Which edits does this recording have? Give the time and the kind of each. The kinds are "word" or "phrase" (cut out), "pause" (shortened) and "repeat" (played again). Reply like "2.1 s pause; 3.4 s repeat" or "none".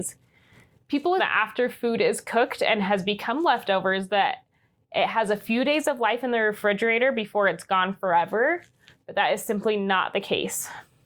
1.2 s word